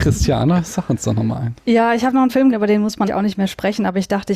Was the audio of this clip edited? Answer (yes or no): yes